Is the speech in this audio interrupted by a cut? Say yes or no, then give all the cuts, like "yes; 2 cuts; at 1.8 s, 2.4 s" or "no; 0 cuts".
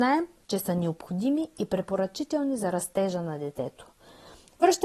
no; 0 cuts